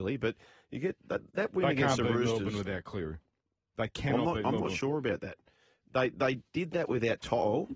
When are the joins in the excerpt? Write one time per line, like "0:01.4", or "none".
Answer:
none